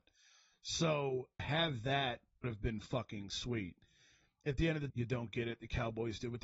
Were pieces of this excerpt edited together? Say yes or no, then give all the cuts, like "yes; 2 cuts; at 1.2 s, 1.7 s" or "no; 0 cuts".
yes; 3 cuts; at 1.4 s, 2.4 s, 4.9 s